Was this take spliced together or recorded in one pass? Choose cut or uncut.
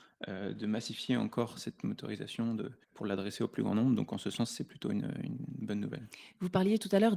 cut